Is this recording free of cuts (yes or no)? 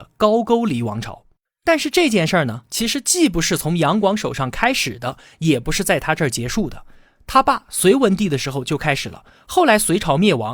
yes